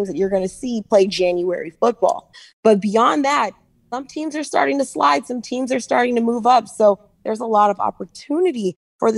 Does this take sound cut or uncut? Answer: uncut